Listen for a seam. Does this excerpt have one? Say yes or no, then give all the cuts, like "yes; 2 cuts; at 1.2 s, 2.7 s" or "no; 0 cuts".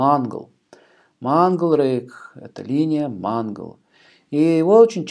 no; 0 cuts